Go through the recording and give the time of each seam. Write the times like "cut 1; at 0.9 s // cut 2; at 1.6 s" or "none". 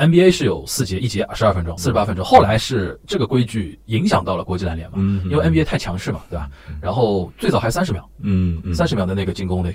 cut 1; at 1.8 s // cut 2; at 3.0 s